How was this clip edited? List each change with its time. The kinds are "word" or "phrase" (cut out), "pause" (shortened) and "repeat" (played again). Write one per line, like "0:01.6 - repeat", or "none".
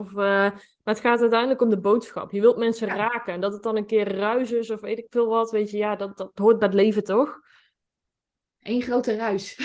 none